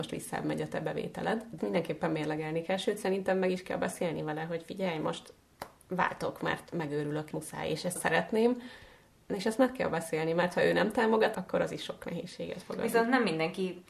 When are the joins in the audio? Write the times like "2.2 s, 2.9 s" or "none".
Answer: 1.6 s, 7.3 s, 8.0 s, 11.3 s